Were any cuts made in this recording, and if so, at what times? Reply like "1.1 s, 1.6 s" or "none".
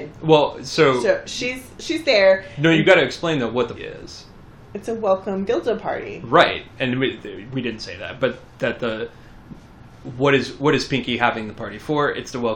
3.8 s